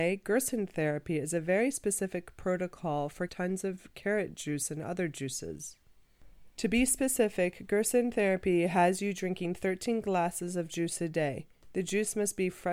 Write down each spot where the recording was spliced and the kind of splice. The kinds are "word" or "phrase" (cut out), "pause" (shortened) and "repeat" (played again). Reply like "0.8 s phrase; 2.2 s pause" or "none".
3.3 s phrase